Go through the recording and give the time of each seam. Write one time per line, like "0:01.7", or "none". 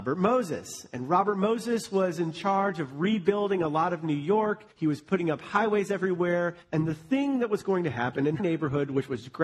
0:04.7
0:06.6
0:08.4